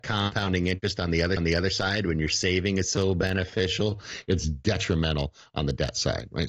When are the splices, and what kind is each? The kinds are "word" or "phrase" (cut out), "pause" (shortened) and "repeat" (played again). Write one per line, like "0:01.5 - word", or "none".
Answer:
0:01.4 - repeat